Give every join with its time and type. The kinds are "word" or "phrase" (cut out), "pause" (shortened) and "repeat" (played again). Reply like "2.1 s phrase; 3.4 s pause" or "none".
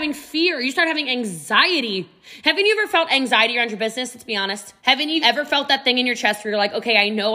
4.8 s pause; 5.2 s word